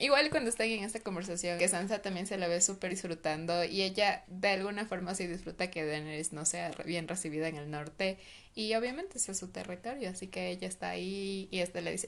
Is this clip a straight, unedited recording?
no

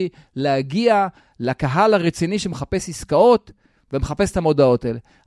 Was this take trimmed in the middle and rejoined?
no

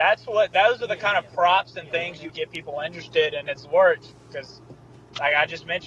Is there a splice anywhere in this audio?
yes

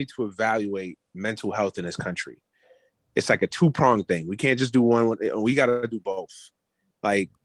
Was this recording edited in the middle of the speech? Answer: no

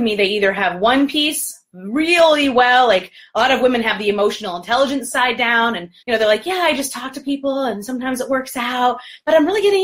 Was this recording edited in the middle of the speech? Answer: yes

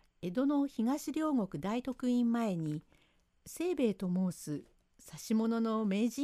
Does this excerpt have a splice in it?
no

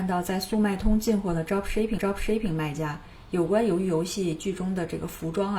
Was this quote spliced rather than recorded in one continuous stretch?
yes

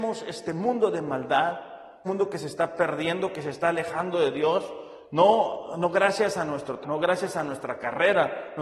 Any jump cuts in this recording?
yes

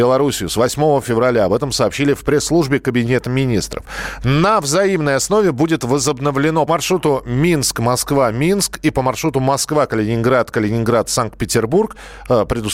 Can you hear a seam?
yes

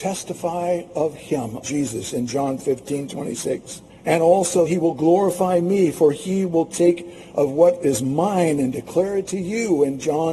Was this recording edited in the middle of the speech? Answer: yes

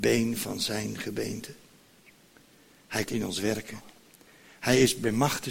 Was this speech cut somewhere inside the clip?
yes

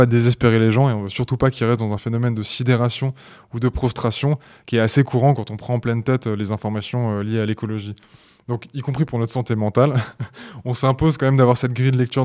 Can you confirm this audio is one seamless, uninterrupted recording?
yes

